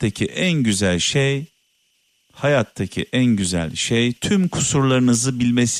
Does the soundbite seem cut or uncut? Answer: uncut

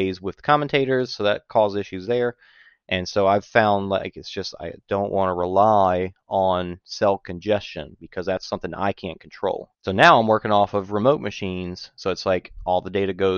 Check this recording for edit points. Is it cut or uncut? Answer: cut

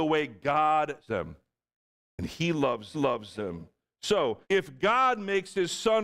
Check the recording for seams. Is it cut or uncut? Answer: cut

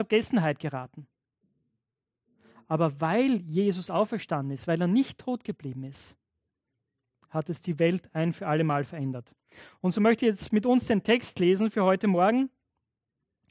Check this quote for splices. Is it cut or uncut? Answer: uncut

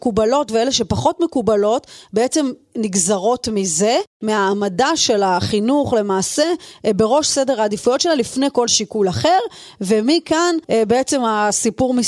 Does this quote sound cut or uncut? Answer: cut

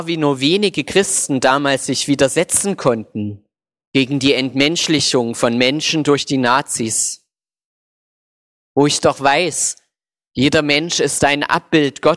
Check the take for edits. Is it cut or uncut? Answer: uncut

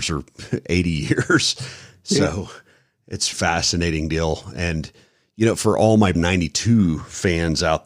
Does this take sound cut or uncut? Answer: cut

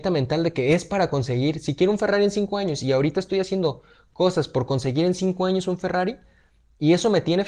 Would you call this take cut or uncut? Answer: uncut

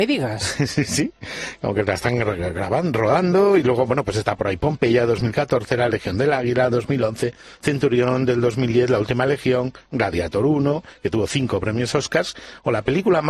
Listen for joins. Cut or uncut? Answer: uncut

